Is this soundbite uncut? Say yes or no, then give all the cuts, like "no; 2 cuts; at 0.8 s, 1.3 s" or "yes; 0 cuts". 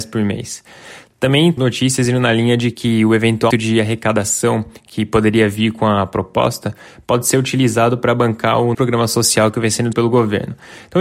no; 4 cuts; at 1.6 s, 3.5 s, 8.7 s, 9.9 s